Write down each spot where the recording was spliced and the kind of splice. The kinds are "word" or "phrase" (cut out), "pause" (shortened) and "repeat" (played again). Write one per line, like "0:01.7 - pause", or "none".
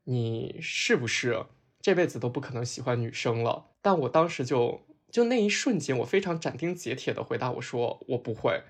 0:03.7 - pause